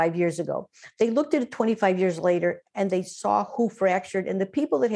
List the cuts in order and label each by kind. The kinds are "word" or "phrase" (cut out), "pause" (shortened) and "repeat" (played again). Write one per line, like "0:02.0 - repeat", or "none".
none